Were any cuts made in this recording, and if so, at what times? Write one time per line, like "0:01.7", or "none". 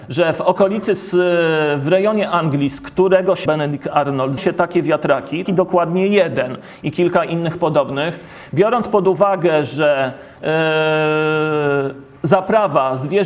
0:03.5
0:04.4
0:05.5
0:12.2